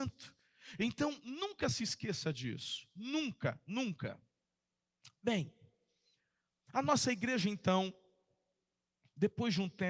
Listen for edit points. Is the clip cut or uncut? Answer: uncut